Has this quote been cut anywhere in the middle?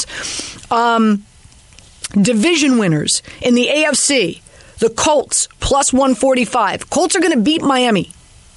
no; 0 cuts

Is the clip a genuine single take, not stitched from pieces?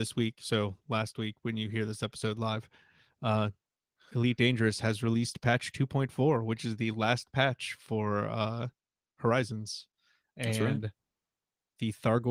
yes; 0 cuts

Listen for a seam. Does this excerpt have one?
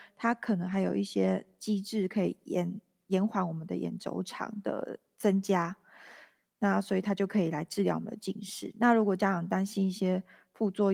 no; 0 cuts

